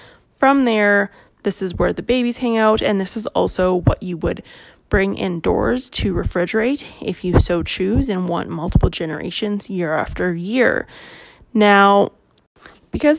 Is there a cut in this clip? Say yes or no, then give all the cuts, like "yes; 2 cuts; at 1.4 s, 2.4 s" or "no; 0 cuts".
no; 0 cuts